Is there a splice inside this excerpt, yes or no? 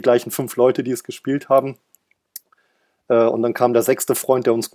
no